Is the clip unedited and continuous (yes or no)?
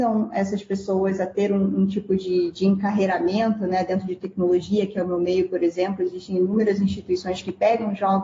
yes